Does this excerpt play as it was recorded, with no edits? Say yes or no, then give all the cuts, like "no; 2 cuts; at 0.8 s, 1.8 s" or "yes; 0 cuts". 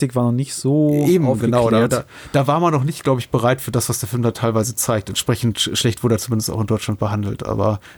yes; 0 cuts